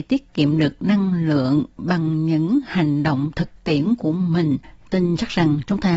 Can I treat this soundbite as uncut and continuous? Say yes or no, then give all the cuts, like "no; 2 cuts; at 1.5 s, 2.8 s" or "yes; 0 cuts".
yes; 0 cuts